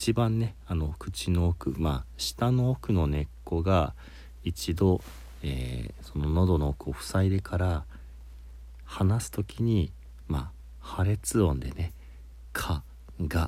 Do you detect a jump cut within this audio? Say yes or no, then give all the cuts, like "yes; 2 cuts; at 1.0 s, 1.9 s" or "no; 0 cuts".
no; 0 cuts